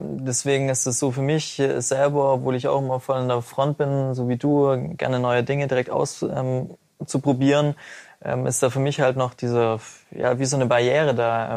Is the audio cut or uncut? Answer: uncut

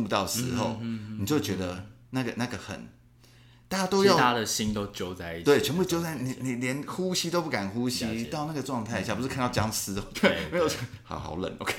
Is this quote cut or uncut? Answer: cut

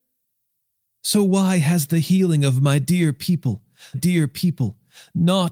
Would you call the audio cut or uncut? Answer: cut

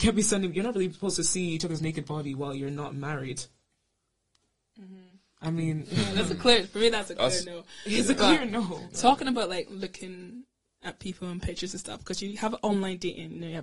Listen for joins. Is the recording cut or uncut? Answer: uncut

